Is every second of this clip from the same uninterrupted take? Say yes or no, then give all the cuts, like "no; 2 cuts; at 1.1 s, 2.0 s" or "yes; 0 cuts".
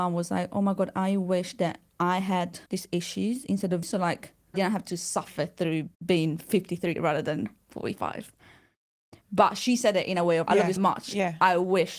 no; 7 cuts; at 2.7 s, 3.8 s, 4.5 s, 5.9 s, 7.0 s, 10.5 s, 10.8 s